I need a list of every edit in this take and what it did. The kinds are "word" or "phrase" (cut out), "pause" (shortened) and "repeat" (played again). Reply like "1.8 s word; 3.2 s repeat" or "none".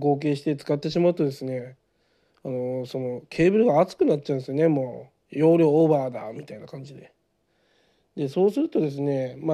none